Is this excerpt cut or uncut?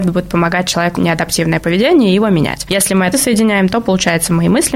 cut